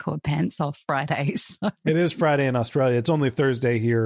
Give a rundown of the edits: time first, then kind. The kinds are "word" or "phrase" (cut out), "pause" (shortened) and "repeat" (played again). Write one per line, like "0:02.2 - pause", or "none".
none